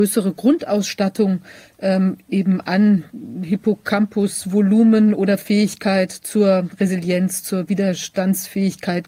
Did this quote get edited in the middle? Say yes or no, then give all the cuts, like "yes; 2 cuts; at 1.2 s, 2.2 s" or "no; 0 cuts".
no; 0 cuts